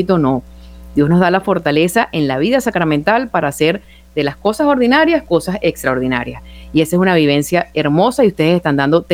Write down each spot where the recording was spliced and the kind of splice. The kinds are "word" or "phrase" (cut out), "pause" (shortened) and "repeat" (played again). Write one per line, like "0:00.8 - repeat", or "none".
none